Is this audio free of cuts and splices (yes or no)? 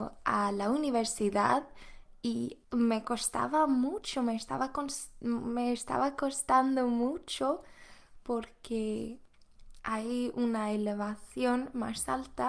no